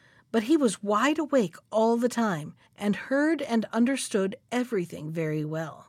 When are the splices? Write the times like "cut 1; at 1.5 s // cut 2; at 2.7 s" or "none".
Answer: cut 1; at 2.7 s

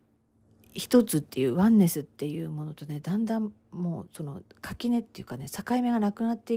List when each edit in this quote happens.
cut 1; at 4.5 s

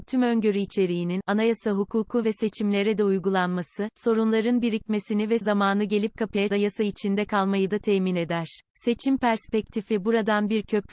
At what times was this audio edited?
cut 1; at 5.4 s // cut 2; at 6.5 s // cut 3; at 8.7 s

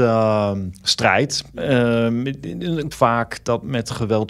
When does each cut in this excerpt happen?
cut 1; at 2.9 s

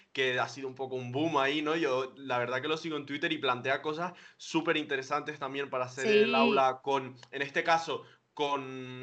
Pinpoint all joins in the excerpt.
none

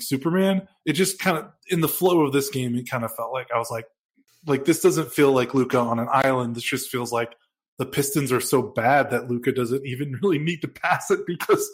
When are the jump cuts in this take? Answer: none

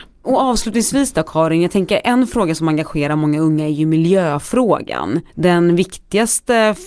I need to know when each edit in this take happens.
cut 1; at 5.3 s

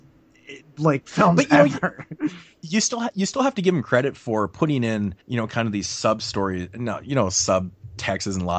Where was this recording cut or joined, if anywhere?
cut 1; at 5.2 s

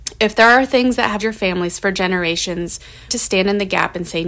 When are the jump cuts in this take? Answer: cut 1; at 1.2 s // cut 2; at 3.1 s

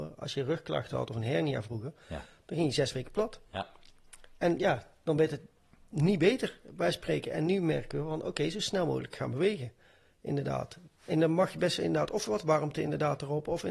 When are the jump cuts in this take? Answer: none

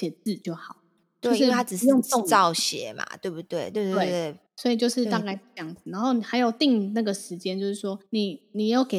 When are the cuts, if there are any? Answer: cut 1; at 4.5 s // cut 2; at 8.1 s

